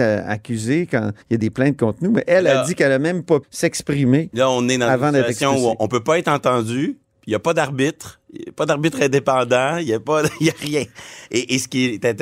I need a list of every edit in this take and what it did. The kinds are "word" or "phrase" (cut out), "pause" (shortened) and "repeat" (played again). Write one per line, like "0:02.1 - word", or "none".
0:01.2 - pause
0:03.4 - word